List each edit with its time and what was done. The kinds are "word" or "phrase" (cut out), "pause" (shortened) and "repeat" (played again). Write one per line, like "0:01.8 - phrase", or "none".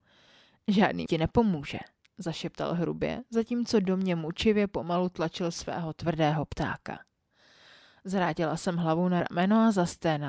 0:01.1 - word
0:09.2 - word